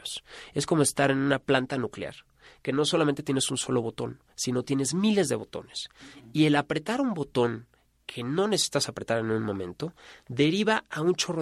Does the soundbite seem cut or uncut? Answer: uncut